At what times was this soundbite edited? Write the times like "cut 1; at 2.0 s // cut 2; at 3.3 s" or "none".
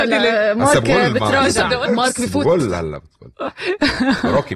cut 1; at 1.9 s

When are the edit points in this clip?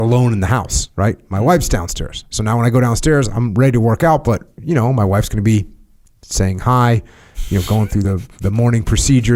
none

